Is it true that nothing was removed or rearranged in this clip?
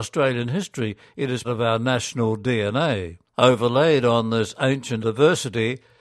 no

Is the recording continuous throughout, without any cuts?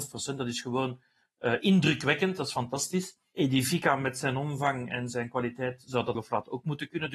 no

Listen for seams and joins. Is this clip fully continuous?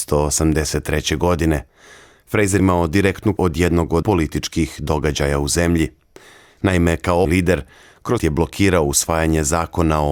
no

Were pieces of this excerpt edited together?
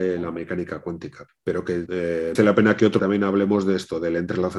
yes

